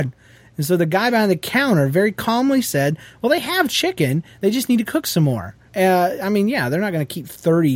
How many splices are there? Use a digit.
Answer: 1